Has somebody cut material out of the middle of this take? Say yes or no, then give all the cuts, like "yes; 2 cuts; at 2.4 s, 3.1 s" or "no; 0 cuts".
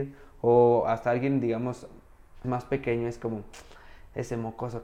yes; 1 cut; at 2.4 s